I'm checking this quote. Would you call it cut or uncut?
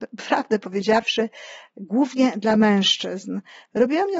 uncut